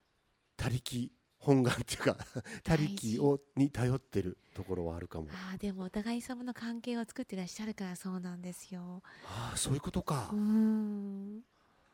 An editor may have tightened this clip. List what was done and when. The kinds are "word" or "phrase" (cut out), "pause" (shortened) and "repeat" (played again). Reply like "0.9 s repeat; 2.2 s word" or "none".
1.2 s pause